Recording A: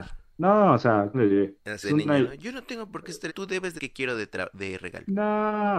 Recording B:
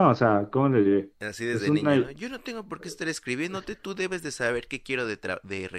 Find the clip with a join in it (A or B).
A